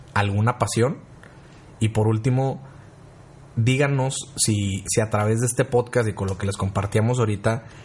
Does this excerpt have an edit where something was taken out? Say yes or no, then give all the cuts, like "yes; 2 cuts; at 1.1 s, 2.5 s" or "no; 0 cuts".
no; 0 cuts